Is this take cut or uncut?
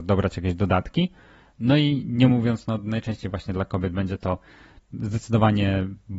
uncut